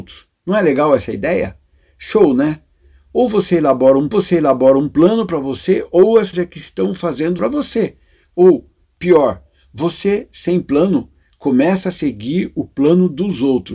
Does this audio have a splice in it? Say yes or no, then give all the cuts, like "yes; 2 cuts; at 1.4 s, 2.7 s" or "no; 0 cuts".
yes; 3 cuts; at 4.1 s, 6.3 s, 7.4 s